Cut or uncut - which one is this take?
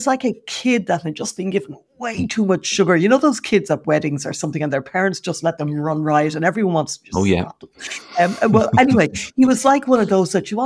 uncut